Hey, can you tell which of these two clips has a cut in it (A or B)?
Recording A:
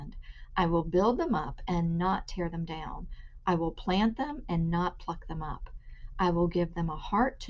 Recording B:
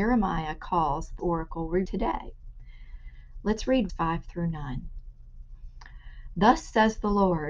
B